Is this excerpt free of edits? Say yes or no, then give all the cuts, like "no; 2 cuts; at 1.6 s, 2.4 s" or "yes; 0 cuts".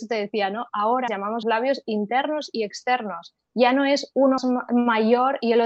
no; 3 cuts; at 1.1 s, 1.4 s, 4.4 s